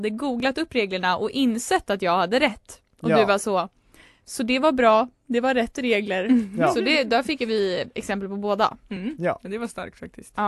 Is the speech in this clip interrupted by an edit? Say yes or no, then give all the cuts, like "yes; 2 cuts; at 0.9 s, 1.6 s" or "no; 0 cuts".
no; 0 cuts